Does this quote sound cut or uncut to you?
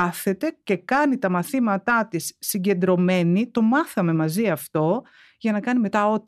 uncut